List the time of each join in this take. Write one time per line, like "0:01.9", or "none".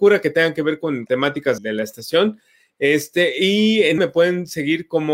0:01.1
0:01.6
0:04.0